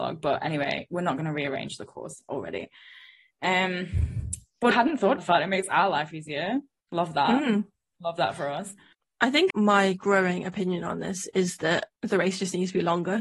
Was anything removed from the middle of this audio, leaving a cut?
yes; 4 cuts; at 4.7 s, 5.2 s, 9.5 s, 11.9 s

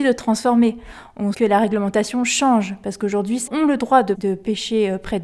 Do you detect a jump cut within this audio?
yes; 3 cuts; at 1.3 s, 3.5 s, 4.1 s

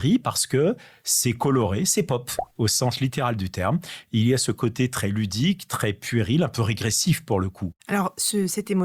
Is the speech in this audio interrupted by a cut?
yes; 1 cut; at 7.8 s

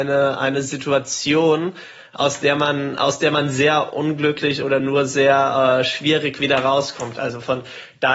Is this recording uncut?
yes; 0 cuts

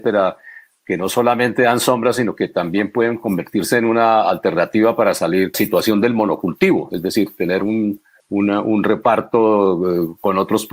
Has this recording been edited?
yes; 2 cuts; at 5.5 s, 8.2 s

